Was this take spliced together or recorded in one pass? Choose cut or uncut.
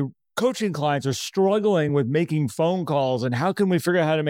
uncut